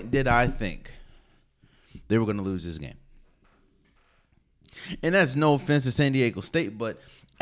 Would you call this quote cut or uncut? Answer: uncut